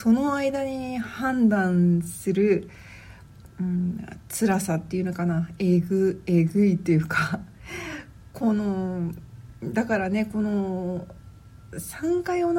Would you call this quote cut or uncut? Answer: uncut